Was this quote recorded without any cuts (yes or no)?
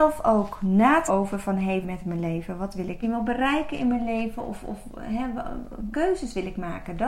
no